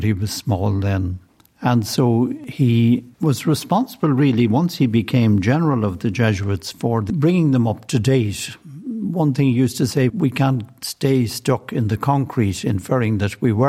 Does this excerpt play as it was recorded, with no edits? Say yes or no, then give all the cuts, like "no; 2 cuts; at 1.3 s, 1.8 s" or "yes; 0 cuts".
no; 1 cut; at 10.1 s